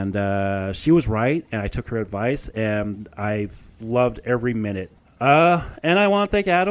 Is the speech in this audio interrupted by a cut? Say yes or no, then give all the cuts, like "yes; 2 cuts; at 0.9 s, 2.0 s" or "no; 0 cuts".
no; 0 cuts